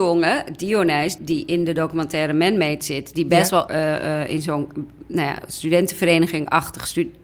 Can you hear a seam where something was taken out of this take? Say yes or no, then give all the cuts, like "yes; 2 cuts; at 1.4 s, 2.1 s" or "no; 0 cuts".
yes; 2 cuts; at 1.2 s, 3.7 s